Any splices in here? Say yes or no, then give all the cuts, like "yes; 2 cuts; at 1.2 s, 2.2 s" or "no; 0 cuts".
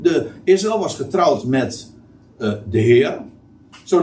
no; 0 cuts